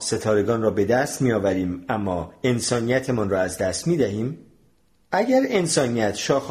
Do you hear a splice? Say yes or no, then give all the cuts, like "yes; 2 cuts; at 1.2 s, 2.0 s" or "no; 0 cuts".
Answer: no; 0 cuts